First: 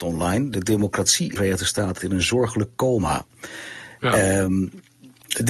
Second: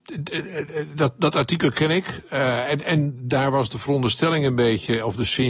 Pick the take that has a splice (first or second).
first